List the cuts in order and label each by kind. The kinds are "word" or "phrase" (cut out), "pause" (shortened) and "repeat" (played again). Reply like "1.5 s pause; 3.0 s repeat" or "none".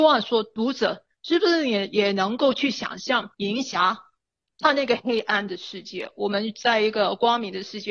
3.3 s pause